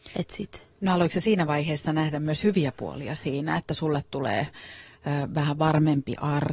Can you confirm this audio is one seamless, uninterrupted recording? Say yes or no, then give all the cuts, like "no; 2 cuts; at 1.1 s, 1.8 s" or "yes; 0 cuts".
yes; 0 cuts